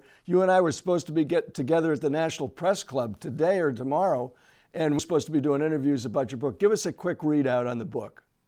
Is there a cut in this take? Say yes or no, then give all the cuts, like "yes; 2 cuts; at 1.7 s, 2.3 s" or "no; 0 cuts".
yes; 1 cut; at 5.0 s